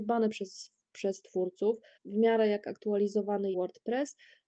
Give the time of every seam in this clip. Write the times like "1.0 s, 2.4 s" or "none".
2.0 s, 3.5 s